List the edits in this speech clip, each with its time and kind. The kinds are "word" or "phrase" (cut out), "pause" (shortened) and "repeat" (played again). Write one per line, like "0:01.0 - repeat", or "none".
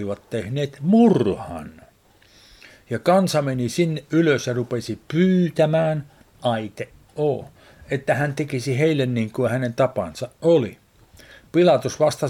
none